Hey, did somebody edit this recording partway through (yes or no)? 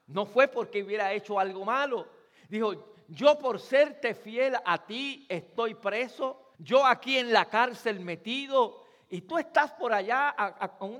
yes